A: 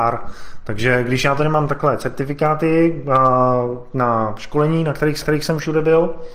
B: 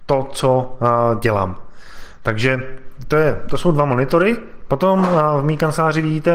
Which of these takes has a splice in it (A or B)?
A